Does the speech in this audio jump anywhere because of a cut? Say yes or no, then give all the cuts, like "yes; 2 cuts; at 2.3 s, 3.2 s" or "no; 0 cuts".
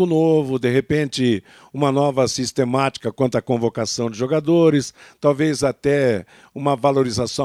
no; 0 cuts